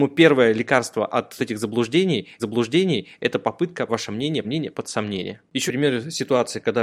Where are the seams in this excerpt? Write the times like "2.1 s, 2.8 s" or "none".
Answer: 1.4 s, 2.4 s, 3.9 s, 4.4 s, 5.7 s